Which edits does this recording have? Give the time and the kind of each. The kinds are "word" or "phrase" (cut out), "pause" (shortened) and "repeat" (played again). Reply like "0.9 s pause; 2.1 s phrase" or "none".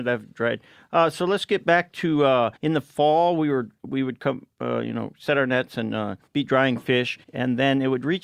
2.6 s pause; 6.3 s pause; 7.2 s pause